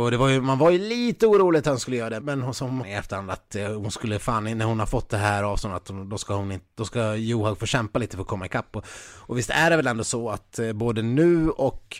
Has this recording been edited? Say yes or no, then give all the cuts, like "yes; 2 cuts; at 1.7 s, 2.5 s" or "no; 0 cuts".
yes; 2 cuts; at 2.2 s, 2.8 s